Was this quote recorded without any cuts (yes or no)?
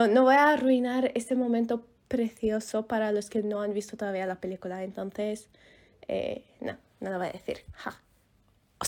yes